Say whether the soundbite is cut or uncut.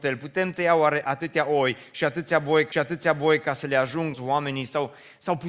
cut